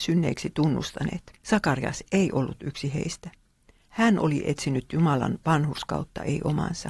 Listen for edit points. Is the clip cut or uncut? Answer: cut